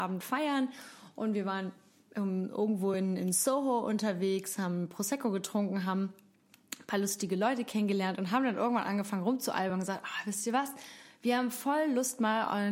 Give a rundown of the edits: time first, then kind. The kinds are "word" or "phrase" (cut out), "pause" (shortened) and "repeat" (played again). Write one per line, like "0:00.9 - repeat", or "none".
none